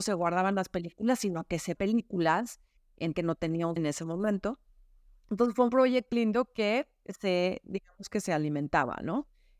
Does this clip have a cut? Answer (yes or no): yes